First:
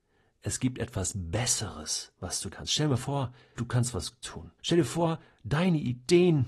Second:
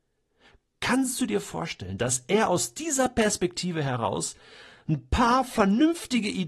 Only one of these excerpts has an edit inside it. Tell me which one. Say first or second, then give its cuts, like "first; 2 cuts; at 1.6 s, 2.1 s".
first; 4 cuts; at 2.5 s, 3.6 s, 4.2 s, 4.6 s